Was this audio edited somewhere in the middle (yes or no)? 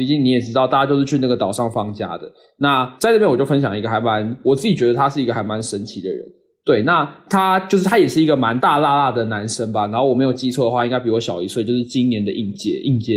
no